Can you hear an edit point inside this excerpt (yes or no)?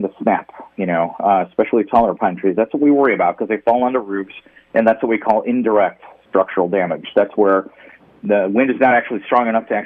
no